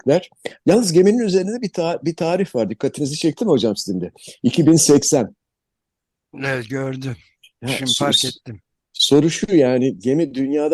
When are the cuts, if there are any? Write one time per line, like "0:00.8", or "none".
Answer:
none